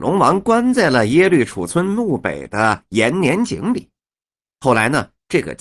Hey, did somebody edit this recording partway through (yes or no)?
no